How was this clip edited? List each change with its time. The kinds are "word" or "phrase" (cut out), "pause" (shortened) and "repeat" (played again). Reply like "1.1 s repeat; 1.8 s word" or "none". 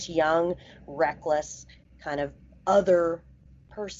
none

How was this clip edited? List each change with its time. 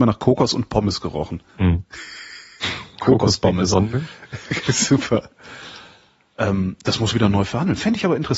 1.5 s pause; 7.1 s phrase

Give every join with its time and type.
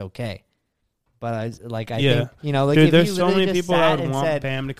none

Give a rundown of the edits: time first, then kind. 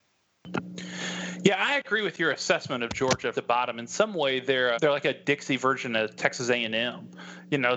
3.3 s phrase; 4.7 s word

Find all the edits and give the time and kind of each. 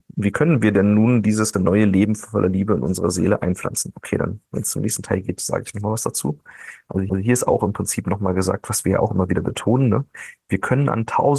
1.5 s word; 7.1 s repeat; 10.4 s pause

